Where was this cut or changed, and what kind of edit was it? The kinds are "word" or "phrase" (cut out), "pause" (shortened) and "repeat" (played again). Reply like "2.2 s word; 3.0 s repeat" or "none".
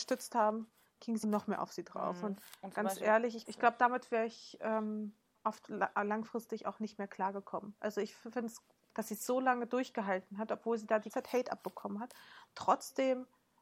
1.2 s word; 3.5 s word; 8.9 s word; 11.1 s word